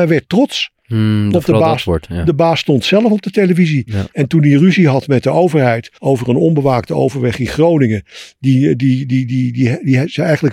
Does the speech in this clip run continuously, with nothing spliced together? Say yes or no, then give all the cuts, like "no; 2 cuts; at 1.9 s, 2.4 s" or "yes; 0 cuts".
no; 1 cut; at 6.0 s